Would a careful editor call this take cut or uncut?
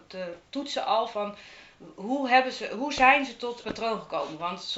cut